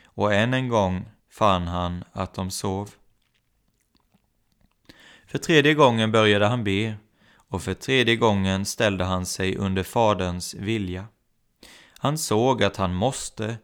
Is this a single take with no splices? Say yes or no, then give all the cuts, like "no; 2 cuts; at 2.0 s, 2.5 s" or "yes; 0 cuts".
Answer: no; 1 cut; at 1.2 s